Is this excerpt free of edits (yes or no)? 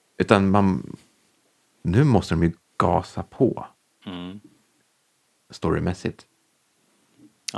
yes